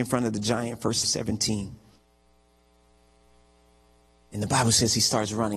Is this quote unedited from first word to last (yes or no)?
no